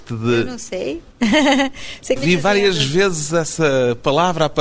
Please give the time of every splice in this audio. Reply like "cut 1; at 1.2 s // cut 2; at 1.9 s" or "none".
cut 1; at 2.2 s

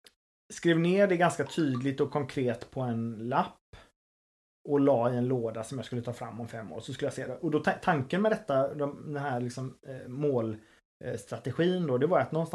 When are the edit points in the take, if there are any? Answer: none

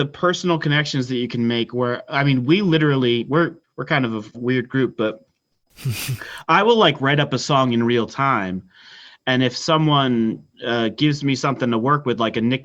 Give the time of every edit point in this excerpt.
cut 1; at 3.6 s // cut 2; at 4.3 s

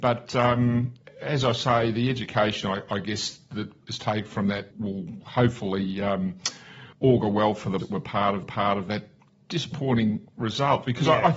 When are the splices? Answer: cut 1; at 4.7 s // cut 2; at 6.9 s // cut 3; at 7.8 s // cut 4; at 8.4 s

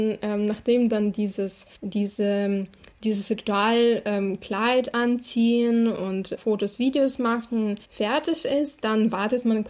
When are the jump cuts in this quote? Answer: cut 1; at 1.7 s // cut 2; at 6.4 s // cut 3; at 7.8 s

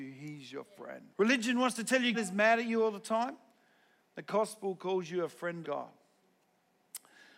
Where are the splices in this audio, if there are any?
cut 1; at 1.1 s // cut 2; at 2.1 s // cut 3; at 5.6 s

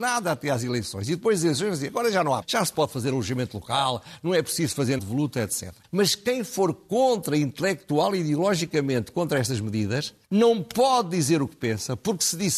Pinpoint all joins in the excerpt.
cut 1; at 2.4 s // cut 2; at 5.0 s // cut 3; at 5.8 s // cut 4; at 10.2 s

